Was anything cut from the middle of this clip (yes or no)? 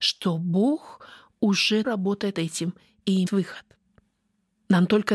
yes